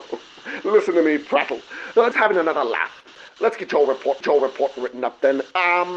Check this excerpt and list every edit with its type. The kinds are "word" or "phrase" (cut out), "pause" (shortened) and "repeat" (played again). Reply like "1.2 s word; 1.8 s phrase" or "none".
2.1 s word; 4.2 s repeat